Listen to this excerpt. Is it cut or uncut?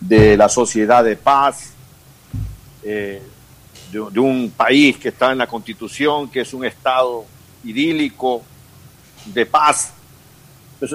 uncut